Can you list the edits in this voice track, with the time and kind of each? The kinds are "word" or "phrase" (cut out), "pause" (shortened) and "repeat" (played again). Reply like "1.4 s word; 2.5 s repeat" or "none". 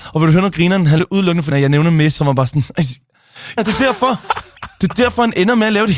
1.0 s word; 1.5 s phrase; 2.2 s word; 3.6 s word